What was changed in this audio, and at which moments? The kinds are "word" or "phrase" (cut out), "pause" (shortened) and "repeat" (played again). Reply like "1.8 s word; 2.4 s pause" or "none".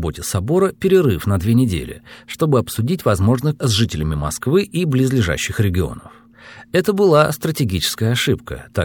3.6 s word